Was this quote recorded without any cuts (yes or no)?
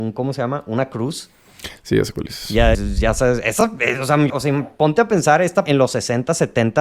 no